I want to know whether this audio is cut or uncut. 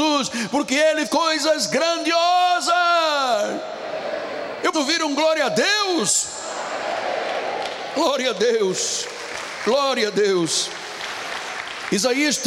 cut